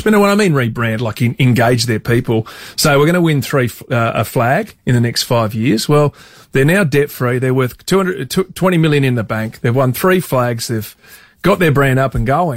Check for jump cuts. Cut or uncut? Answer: uncut